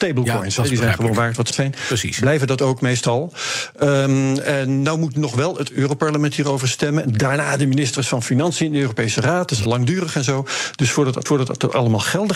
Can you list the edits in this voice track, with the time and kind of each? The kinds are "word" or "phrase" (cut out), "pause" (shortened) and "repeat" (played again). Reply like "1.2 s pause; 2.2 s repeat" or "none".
1.5 s phrase; 9.7 s word; 11.3 s repeat